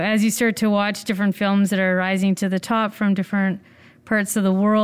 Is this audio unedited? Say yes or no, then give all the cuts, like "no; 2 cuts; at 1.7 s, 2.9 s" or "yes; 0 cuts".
yes; 0 cuts